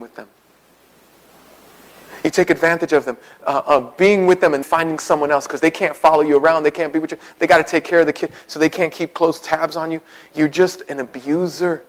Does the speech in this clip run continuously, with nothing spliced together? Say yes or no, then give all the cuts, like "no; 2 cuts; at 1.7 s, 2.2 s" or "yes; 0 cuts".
no; 1 cut; at 4.6 s